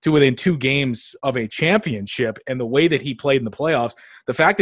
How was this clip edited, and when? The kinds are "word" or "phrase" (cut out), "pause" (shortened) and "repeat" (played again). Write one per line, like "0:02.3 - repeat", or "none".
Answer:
none